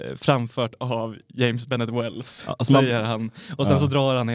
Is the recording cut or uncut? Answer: uncut